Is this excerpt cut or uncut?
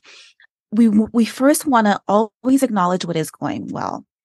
uncut